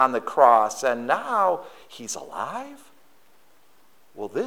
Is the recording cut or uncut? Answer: uncut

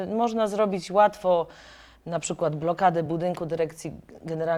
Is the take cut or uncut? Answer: uncut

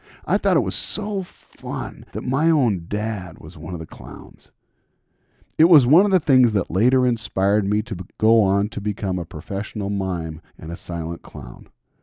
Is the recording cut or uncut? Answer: cut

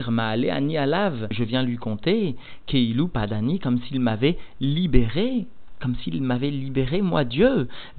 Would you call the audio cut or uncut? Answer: uncut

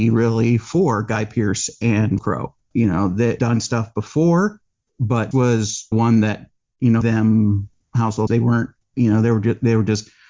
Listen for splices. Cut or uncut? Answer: cut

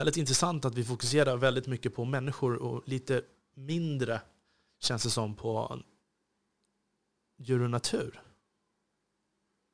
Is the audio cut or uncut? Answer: uncut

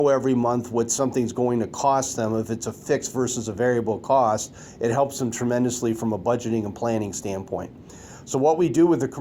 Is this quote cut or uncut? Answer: uncut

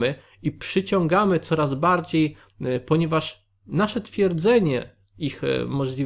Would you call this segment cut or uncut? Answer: uncut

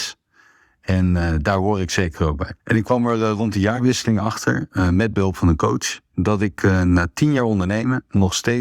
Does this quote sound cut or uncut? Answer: cut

